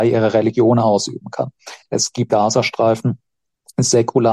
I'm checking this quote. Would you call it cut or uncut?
cut